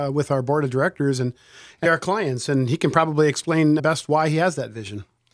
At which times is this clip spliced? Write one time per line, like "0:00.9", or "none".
0:01.9
0:03.8